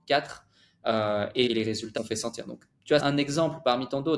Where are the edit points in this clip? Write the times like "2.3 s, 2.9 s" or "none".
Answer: 1.5 s, 2.0 s, 3.0 s